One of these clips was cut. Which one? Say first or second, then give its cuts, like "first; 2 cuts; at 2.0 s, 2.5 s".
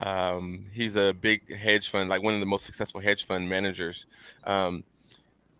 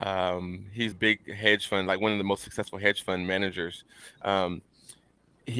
second; 1 cut; at 0.9 s